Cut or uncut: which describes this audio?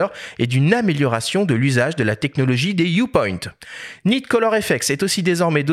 uncut